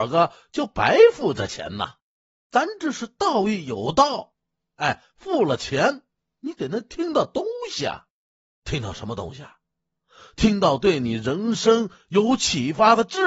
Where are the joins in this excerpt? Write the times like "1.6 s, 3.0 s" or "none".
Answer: 5.1 s